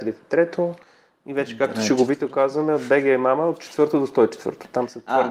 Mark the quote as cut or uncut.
uncut